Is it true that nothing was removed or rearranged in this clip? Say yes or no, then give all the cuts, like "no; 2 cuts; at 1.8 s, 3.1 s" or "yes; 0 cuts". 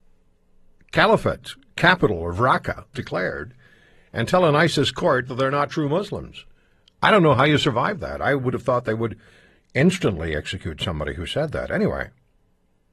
no; 1 cut; at 2.9 s